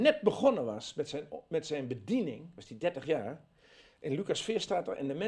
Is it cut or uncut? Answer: uncut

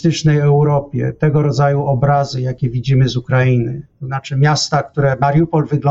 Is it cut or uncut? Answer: uncut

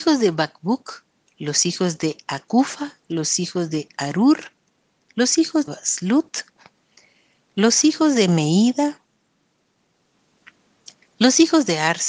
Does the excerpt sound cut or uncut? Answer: cut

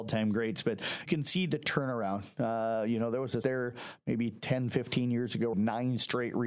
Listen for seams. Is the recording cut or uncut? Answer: cut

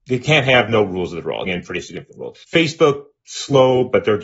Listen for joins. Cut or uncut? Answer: cut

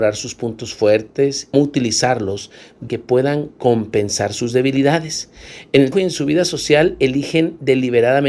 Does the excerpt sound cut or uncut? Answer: cut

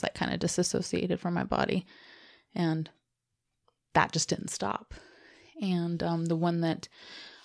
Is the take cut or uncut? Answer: uncut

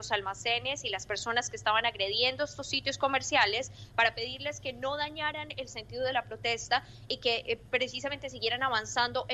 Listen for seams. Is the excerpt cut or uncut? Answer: uncut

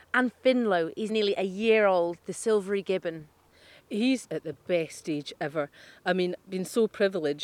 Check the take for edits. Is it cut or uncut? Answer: cut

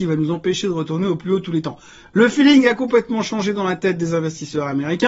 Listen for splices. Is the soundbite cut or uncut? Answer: uncut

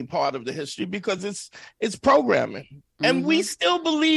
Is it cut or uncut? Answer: uncut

